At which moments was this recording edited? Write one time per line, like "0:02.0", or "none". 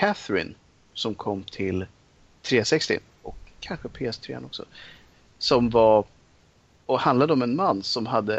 none

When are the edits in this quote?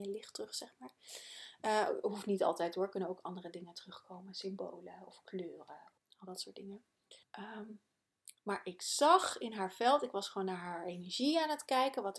0:06.0
0:07.2

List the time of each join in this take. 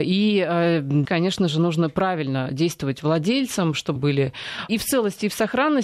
0:01.0
0:04.0
0:04.7

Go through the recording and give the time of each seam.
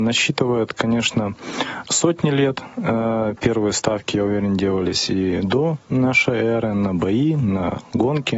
none

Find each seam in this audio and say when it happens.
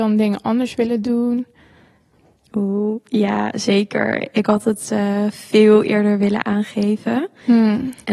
none

